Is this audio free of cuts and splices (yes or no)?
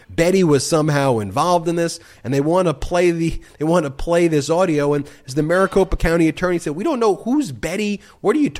yes